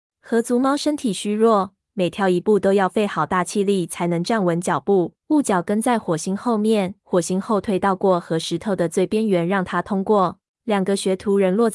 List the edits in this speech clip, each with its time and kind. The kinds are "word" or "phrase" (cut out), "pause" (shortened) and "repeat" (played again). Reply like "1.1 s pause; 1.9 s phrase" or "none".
5.2 s pause; 7.0 s pause; 10.5 s pause